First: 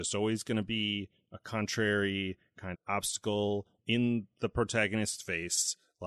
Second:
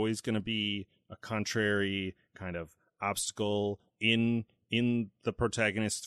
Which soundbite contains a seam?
first; 2 cuts; at 2.7 s, 3.8 s

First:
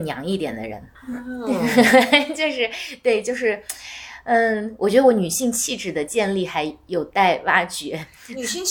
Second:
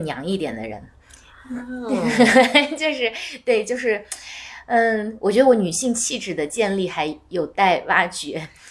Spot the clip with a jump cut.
first; 1 cut; at 0.9 s

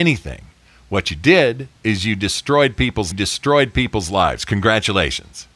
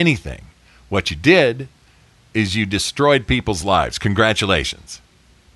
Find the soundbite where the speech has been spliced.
first; 2 cuts; at 1.8 s, 3.1 s

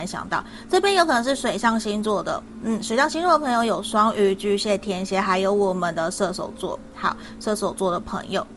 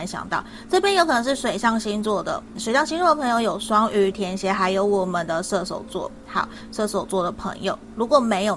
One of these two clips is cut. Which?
second; 2 cuts; at 2.6 s, 4.1 s

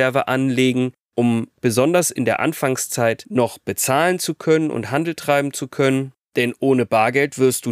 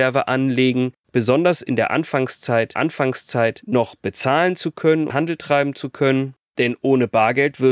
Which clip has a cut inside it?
second; 3 cuts; at 1.0 s, 2.7 s, 5.1 s

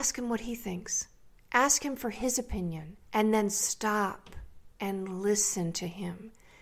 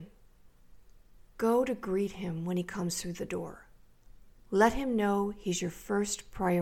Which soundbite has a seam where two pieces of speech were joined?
first; 2 cuts; at 3.0 s, 4.7 s

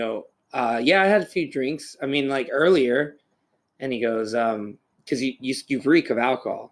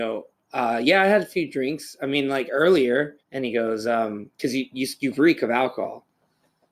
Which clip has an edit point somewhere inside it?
second; 2 cuts; at 3.2 s, 4.3 s

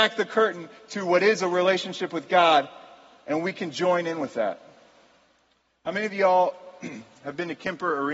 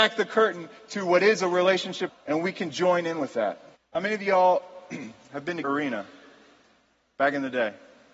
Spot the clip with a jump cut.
second; 3 cuts; at 2.1 s, 3.8 s, 5.6 s

